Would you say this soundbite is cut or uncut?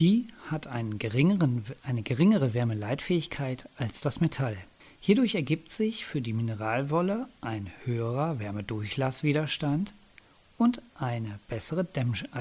uncut